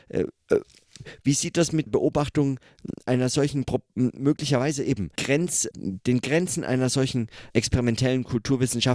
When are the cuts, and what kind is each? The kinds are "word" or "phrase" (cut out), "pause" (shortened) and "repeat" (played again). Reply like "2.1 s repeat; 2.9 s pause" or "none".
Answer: 1.9 s word; 5.2 s word; 5.7 s word; 7.5 s word